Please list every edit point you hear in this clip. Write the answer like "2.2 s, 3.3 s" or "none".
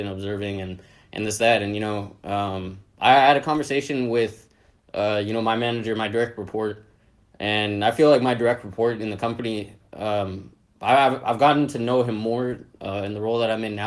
2.9 s

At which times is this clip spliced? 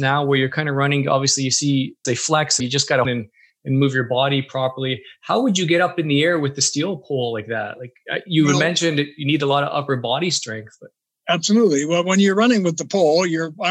2.0 s, 2.6 s, 3.0 s

